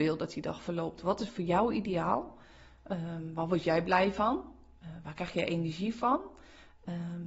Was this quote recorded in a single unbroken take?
yes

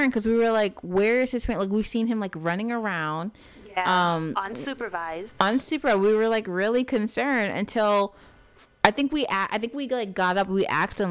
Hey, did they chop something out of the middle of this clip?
no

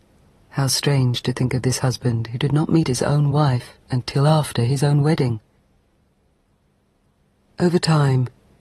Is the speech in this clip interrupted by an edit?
no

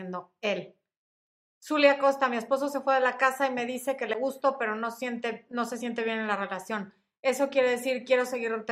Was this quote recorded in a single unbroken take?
yes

